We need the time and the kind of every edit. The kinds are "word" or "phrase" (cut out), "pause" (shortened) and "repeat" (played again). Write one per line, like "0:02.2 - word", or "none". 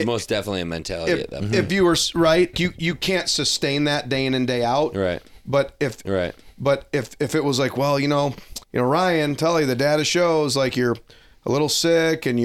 0:02.5 - word
0:06.0 - repeat
0:08.6 - pause